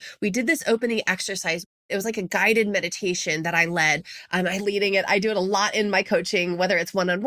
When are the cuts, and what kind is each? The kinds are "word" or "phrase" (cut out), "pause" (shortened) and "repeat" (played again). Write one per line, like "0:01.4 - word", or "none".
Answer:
0:04.6 - word